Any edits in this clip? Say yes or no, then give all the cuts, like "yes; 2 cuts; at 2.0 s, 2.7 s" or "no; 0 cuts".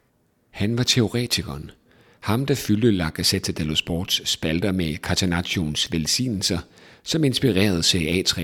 no; 0 cuts